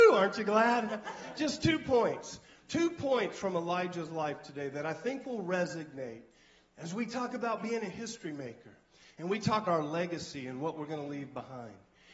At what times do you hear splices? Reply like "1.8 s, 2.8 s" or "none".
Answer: 9.7 s